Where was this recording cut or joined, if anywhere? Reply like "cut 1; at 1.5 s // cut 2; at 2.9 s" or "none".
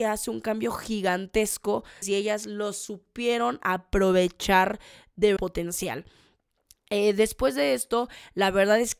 cut 1; at 2.0 s // cut 2; at 5.4 s